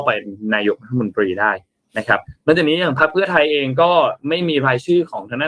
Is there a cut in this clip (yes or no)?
no